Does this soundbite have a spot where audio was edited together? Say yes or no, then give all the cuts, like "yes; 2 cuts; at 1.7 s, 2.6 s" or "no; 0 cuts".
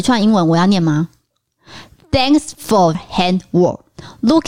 yes; 1 cut; at 2.9 s